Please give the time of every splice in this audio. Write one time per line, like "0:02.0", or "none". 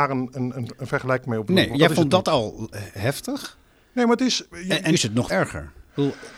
0:01.7
0:04.9
0:05.3